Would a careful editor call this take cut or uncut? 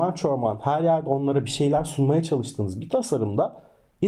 uncut